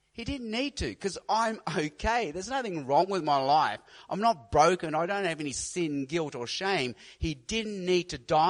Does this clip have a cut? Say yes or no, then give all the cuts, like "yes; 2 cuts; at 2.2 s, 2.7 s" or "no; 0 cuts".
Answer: no; 0 cuts